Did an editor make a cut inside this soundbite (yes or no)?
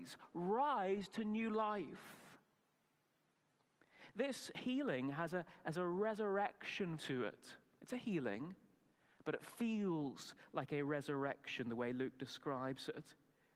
yes